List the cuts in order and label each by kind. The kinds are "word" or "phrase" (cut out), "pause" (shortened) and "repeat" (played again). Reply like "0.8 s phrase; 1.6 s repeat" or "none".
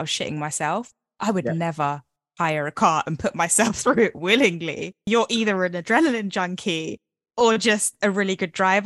none